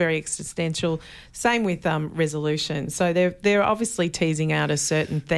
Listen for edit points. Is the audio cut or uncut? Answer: uncut